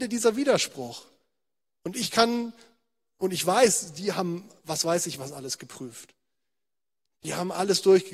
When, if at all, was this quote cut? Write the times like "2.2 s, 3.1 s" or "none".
none